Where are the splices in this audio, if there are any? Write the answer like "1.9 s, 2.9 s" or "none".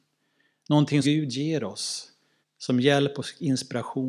1.0 s, 2.4 s